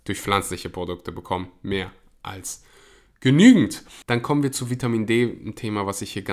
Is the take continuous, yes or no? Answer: yes